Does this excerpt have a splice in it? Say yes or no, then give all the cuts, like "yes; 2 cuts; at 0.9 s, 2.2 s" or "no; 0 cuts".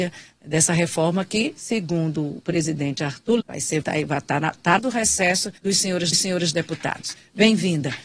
yes; 5 cuts; at 3.4 s, 3.8 s, 4.8 s, 5.6 s, 6.1 s